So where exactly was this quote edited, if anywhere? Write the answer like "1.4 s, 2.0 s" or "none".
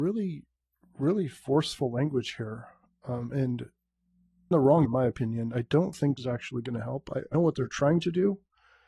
4.5 s, 4.8 s, 5.5 s, 6.2 s, 7.3 s

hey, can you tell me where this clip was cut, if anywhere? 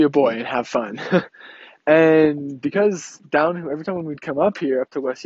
none

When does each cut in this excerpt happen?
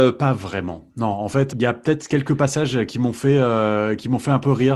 1.5 s

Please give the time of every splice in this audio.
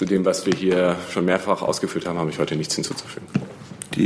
none

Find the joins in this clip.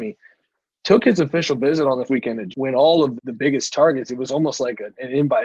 2.1 s, 2.5 s, 3.2 s

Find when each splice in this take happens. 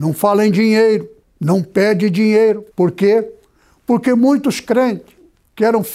1.2 s, 2.7 s

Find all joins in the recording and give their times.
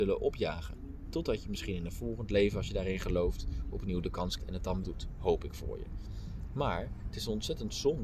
4.4 s, 4.8 s

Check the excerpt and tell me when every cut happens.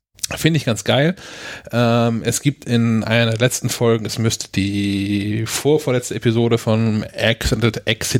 none

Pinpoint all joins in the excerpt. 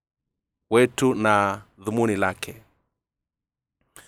none

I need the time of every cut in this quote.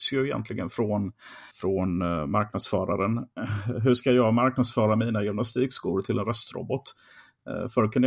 1.5 s

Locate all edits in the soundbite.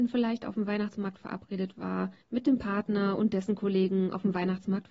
2.2 s

